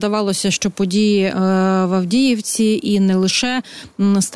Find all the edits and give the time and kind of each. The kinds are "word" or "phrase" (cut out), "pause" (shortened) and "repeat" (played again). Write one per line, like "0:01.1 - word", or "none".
none